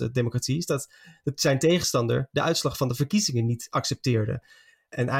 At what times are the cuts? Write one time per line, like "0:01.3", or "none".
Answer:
none